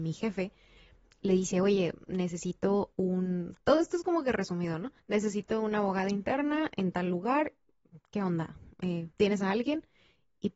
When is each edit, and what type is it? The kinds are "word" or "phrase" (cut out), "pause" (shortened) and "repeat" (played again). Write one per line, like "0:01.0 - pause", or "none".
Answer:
0:05.0 - pause
0:09.1 - pause